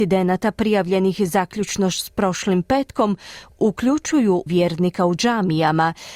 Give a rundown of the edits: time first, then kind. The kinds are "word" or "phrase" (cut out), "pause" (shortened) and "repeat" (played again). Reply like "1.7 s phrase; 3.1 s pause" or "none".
4.5 s word